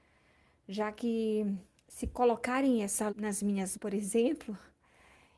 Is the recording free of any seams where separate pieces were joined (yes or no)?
no